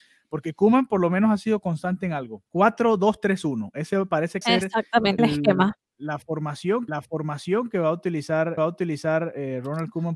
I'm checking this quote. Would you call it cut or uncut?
cut